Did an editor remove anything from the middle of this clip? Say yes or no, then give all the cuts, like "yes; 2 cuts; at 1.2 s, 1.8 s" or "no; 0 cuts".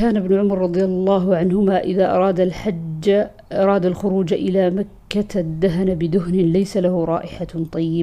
no; 0 cuts